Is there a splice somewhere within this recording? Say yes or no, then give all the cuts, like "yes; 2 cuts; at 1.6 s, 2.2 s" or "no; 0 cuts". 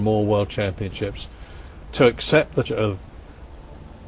yes; 1 cut; at 2.6 s